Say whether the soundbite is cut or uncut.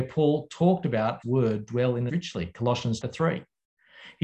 cut